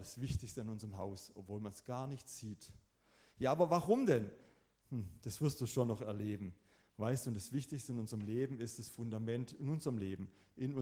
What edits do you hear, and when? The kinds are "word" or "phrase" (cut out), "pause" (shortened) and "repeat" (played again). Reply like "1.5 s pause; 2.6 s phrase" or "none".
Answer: none